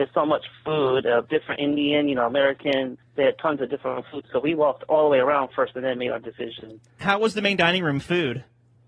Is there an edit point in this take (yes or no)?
yes